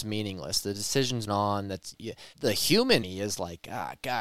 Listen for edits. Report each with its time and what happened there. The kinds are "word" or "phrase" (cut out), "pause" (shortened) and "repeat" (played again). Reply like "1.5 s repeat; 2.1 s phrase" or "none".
1.3 s phrase; 1.9 s phrase; 2.3 s word; 3.0 s word